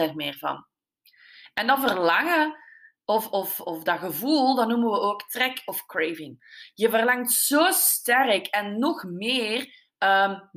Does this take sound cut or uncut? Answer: uncut